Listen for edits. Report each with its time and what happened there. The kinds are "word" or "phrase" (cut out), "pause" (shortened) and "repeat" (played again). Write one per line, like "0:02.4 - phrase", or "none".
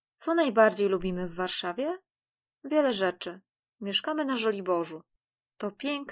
none